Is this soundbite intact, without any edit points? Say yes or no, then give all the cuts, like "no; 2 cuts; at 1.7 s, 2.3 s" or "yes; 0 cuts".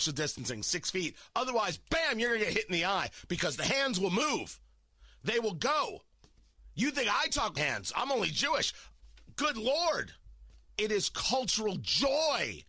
no; 1 cut; at 7.6 s